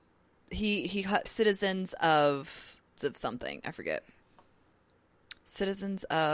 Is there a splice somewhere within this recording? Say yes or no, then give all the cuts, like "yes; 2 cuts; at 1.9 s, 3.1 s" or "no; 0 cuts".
yes; 2 cuts; at 1.3 s, 3.0 s